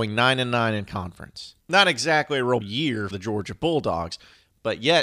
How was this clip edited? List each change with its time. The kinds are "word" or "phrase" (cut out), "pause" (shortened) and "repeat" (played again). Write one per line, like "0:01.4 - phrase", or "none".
0:01.6 - pause
0:02.6 - word
0:03.1 - word